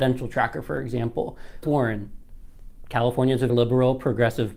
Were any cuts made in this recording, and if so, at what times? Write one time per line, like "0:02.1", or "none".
0:01.6
0:03.5